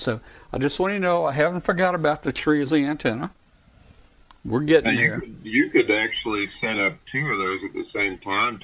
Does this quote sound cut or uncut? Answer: uncut